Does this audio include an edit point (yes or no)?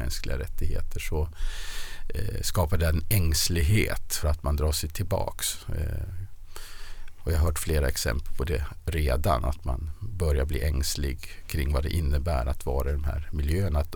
yes